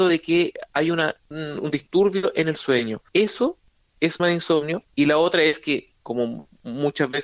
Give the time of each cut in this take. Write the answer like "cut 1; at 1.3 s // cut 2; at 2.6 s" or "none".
cut 1; at 1.3 s // cut 2; at 3.1 s // cut 3; at 4.2 s // cut 4; at 4.9 s // cut 5; at 6.0 s